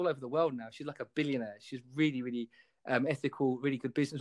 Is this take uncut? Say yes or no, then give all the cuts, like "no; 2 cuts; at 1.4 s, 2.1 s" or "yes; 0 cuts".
yes; 0 cuts